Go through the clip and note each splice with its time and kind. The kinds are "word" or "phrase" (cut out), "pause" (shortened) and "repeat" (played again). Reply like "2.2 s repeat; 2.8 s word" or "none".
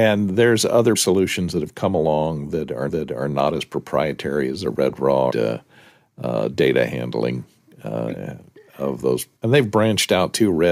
0.9 s word; 2.9 s repeat; 5.3 s phrase; 9.4 s pause